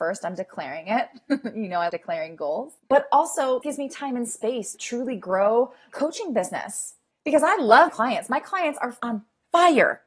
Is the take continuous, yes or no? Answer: no